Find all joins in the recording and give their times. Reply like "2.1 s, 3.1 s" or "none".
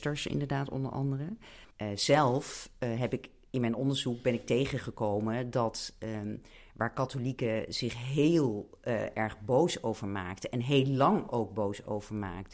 1.7 s